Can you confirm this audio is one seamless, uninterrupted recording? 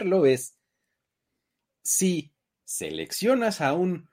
yes; 0 cuts

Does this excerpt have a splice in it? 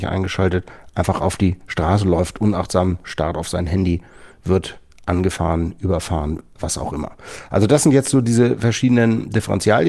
no; 0 cuts

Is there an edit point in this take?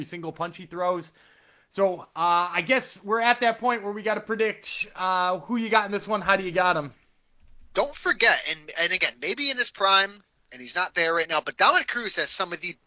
no; 0 cuts

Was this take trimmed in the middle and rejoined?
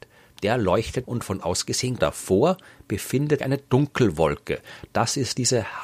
yes; 4 cuts; at 1.0 s, 1.4 s, 2.0 s, 3.4 s

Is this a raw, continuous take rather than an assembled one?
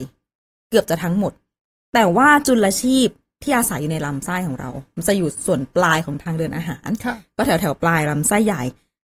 yes; 0 cuts

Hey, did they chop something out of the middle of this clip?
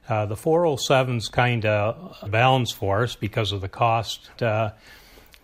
yes; 2 cuts; at 2.3 s, 4.4 s

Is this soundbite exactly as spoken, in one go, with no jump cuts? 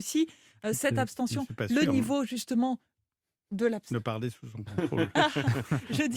yes; 0 cuts

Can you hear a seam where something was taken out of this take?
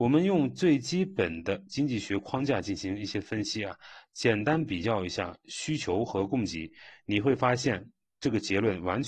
no; 0 cuts

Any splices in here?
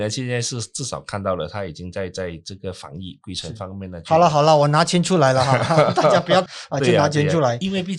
yes; 1 cut; at 6.5 s

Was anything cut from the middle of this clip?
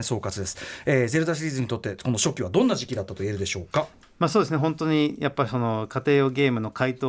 no; 0 cuts

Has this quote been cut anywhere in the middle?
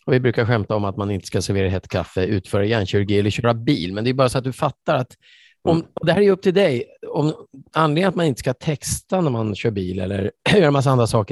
no; 0 cuts

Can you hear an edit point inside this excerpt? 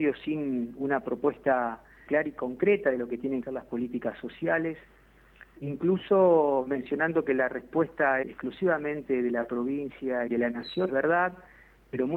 yes; 5 cuts; at 2.1 s, 3.4 s, 8.2 s, 10.3 s, 10.9 s

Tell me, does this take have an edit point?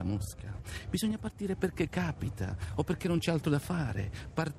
no; 0 cuts

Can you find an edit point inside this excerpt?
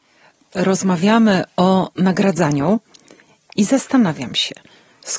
no; 0 cuts

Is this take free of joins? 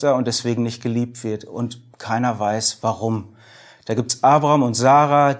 yes; 0 cuts

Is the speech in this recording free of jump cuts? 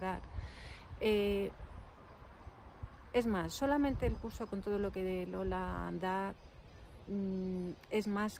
yes; 0 cuts

